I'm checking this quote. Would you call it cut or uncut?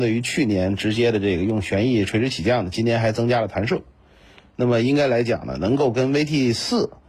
uncut